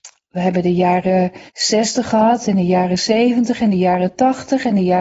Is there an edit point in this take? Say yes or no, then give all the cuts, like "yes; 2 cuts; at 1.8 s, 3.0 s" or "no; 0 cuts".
yes; 1 cut; at 1.5 s